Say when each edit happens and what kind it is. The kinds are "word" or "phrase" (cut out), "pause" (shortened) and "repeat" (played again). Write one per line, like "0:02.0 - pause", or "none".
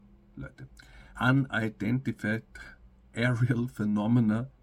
0:01.1 - pause